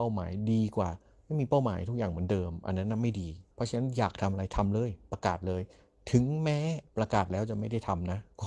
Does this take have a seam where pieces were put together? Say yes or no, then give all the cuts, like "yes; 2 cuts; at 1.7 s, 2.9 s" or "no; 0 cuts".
yes; 2 cuts; at 3.5 s, 6.9 s